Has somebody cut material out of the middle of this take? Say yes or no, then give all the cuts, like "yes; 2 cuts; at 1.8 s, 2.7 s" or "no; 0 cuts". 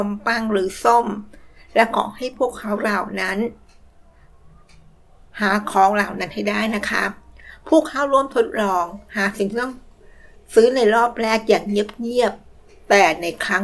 no; 0 cuts